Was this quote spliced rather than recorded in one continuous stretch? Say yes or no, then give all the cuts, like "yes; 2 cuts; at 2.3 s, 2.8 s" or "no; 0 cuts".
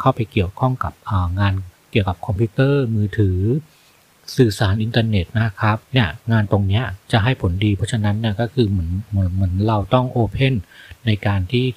yes; 3 cuts; at 1.8 s, 5.3 s, 5.8 s